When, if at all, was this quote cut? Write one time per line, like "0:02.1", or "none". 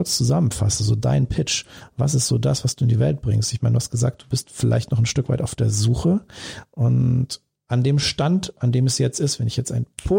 none